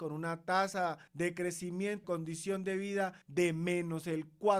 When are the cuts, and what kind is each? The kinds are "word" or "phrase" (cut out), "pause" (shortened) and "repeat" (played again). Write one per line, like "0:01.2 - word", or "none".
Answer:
0:01.1 - pause
0:02.0 - word
0:03.2 - pause

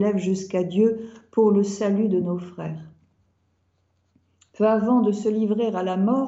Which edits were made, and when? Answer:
none

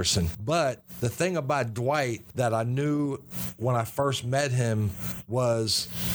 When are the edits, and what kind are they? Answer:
none

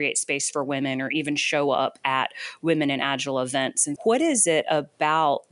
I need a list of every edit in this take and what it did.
0:04.0 - word

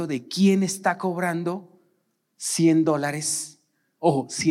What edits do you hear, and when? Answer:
none

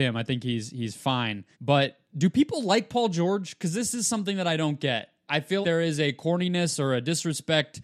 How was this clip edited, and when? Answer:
0:01.5 - pause
0:05.6 - word

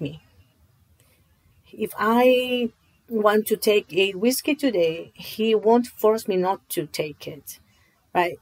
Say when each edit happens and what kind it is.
none

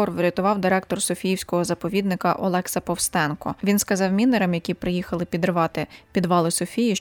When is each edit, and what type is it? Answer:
none

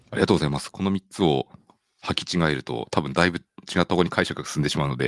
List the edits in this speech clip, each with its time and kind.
none

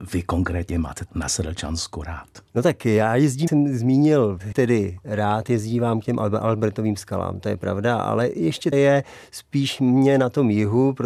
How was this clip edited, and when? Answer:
0:01.1 - word
0:02.5 - pause
0:03.5 - word
0:04.5 - word
0:08.7 - phrase

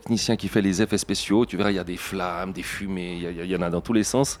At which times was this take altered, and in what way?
none

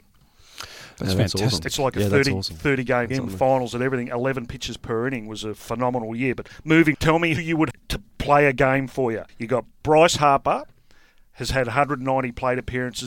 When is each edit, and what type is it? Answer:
0:03.1 - phrase
0:06.9 - phrase
0:07.4 - word
0:07.7 - word
0:09.3 - pause

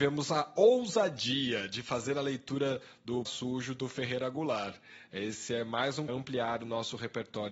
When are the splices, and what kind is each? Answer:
0:03.2 - word
0:06.1 - phrase

